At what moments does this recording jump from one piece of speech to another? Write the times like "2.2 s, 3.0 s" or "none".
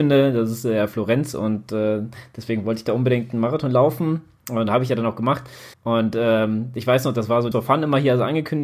5.7 s, 7.5 s